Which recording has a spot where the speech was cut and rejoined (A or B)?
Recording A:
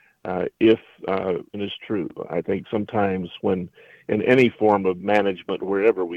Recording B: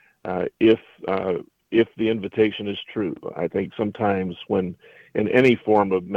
A